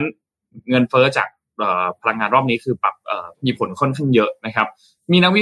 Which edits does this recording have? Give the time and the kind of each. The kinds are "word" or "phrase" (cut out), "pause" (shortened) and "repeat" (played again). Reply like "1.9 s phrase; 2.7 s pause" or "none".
3.3 s pause